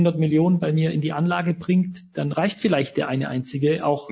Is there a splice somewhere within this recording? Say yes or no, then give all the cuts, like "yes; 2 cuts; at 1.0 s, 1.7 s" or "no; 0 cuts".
no; 0 cuts